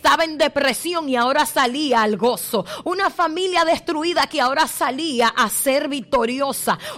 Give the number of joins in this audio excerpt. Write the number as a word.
zero